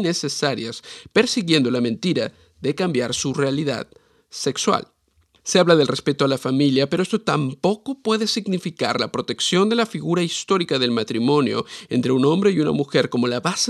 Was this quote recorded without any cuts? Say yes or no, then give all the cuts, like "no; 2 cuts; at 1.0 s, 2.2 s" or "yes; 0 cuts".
yes; 0 cuts